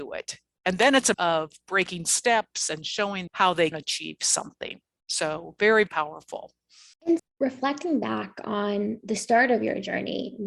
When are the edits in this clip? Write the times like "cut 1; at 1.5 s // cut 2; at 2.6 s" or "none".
cut 1; at 1.1 s // cut 2; at 2.0 s // cut 3; at 3.3 s // cut 4; at 3.7 s // cut 5; at 5.9 s // cut 6; at 7.2 s